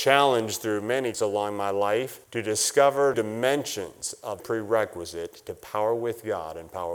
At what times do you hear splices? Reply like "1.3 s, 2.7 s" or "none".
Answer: 1.1 s, 2.2 s, 3.1 s, 4.4 s